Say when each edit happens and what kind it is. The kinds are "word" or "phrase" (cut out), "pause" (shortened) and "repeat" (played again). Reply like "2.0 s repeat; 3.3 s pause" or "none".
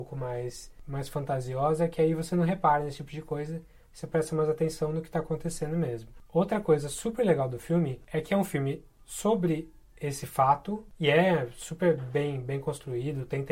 none